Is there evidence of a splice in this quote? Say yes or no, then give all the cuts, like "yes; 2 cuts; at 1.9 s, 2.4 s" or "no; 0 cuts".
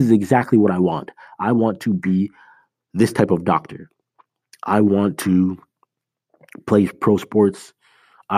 no; 0 cuts